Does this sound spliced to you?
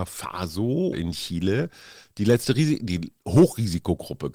yes; 1 cut; at 0.9 s

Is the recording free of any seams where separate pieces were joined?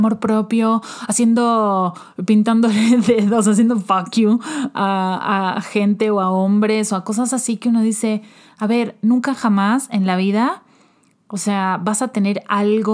yes; 0 cuts

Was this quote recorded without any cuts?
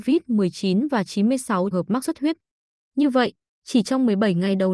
no; 2 cuts; at 1.7 s, 2.0 s

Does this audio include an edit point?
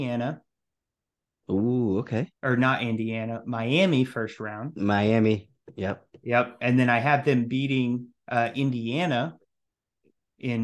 yes; 2 cuts; at 2.4 s, 8.2 s

